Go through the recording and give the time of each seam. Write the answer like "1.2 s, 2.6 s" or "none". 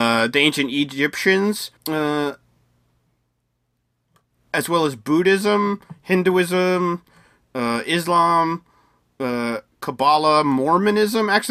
1.8 s